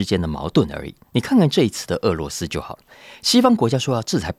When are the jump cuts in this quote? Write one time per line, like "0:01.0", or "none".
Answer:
0:01.1